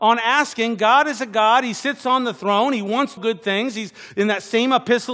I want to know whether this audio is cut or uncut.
cut